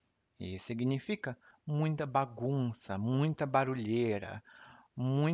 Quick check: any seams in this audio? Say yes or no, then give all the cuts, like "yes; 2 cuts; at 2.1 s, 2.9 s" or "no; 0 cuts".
no; 0 cuts